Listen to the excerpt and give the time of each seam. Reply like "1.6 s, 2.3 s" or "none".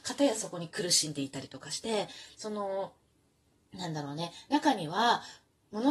2.3 s